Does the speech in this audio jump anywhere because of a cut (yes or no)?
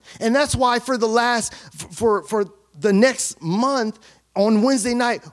no